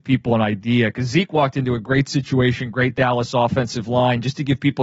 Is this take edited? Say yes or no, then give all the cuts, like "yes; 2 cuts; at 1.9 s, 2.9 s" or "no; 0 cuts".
no; 0 cuts